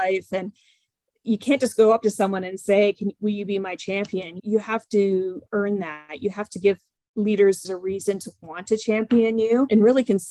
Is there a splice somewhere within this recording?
no; 0 cuts

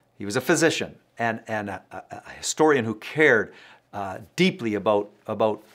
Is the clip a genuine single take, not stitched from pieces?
yes; 0 cuts

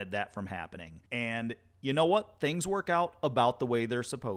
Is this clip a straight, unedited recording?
no; 1 cut; at 1.1 s

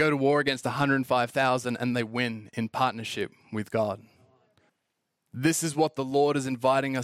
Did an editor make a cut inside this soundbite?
yes; 1 cut; at 4.7 s

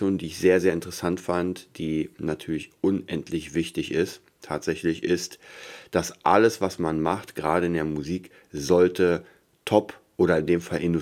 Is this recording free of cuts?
yes; 0 cuts

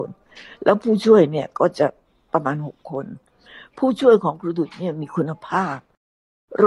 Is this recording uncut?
yes; 0 cuts

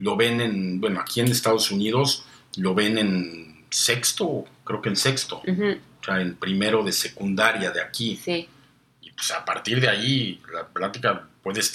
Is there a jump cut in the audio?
no; 0 cuts

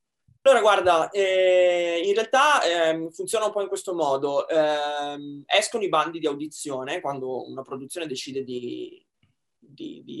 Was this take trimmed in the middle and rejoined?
no; 0 cuts

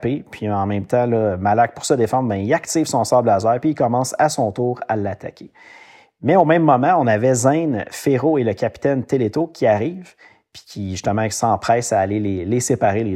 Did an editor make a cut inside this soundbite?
no; 0 cuts

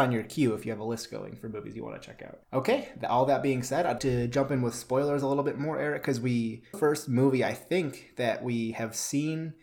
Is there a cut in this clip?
yes; 3 cuts; at 2.4 s, 4.0 s, 6.7 s

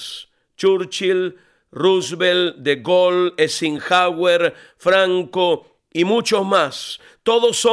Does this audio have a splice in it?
no; 0 cuts

